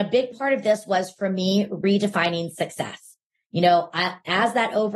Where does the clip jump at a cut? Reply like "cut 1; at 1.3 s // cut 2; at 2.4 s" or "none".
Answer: none